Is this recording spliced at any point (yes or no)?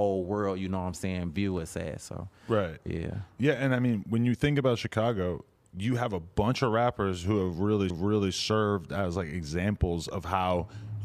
yes